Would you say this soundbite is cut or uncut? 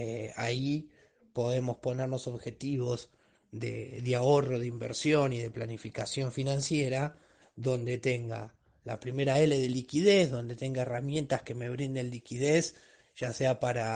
uncut